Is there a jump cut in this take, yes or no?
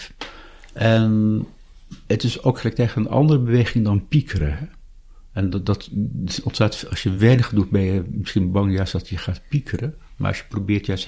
no